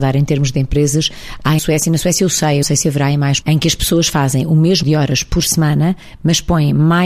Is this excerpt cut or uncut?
cut